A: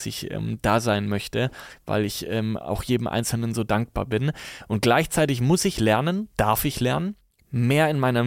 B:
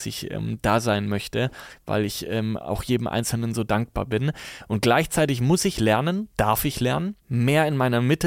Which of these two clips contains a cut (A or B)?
B